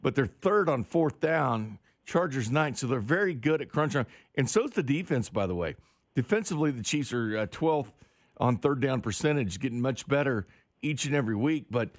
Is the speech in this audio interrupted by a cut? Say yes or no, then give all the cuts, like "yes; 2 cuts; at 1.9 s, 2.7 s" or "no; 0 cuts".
no; 0 cuts